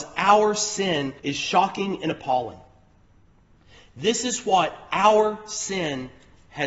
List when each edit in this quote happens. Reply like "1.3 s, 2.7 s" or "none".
1.2 s

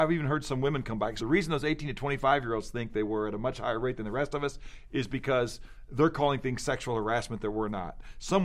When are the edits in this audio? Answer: 1.2 s

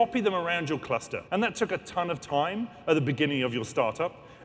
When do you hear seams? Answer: 1.3 s

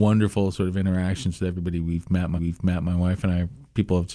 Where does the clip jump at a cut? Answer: 2.4 s

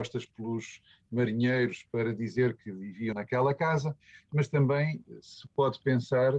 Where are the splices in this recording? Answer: 3.1 s

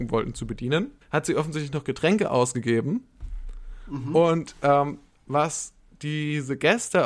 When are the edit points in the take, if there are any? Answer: 1.0 s

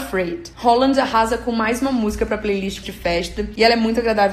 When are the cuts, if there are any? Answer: 2.8 s

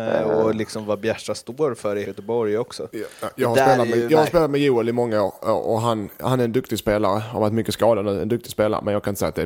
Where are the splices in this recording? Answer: 2.0 s

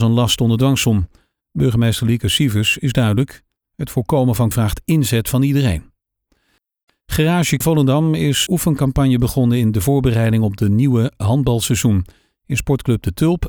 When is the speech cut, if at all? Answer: 4.5 s, 7.6 s, 8.5 s

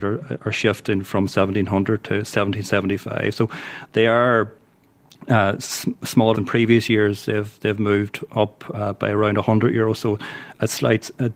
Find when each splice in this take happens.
6.3 s

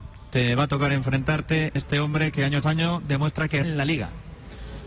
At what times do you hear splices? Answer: 1.8 s, 2.6 s, 3.6 s

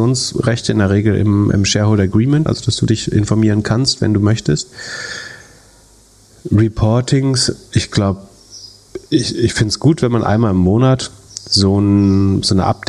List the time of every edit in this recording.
2.5 s, 9.1 s

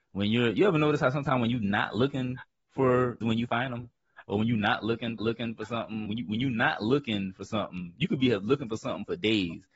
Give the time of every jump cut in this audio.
3.2 s, 5.2 s, 6.0 s

